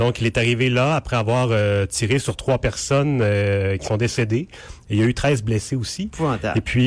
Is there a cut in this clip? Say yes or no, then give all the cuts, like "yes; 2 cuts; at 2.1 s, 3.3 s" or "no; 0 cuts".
no; 0 cuts